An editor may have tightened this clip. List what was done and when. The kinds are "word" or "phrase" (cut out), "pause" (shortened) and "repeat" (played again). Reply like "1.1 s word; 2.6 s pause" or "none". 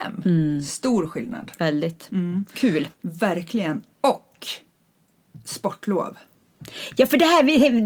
2.9 s pause